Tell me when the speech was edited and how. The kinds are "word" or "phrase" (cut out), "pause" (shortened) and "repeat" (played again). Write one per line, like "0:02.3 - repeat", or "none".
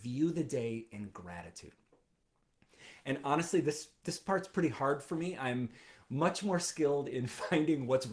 none